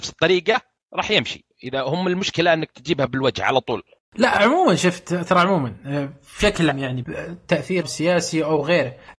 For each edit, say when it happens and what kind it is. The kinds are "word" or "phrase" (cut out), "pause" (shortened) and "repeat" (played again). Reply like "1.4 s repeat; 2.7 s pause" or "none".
6.7 s word; 7.0 s word; 7.8 s word